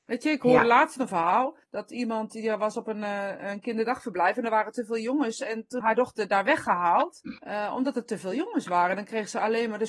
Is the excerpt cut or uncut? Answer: cut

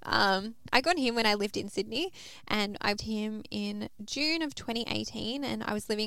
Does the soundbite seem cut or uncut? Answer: cut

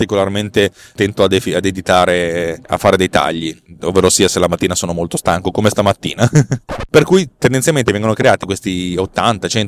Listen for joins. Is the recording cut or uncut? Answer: uncut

